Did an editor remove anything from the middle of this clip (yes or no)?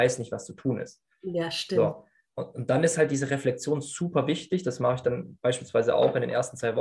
no